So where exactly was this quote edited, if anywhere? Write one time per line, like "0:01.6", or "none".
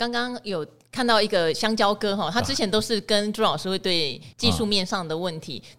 0:04.3